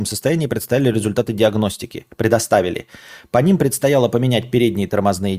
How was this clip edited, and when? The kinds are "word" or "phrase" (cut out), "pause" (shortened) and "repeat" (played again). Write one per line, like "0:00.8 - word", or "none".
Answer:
none